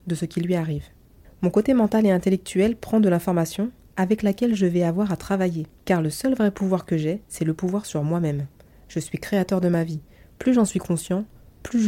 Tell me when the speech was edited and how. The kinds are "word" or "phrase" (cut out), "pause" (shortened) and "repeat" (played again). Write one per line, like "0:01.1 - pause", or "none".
none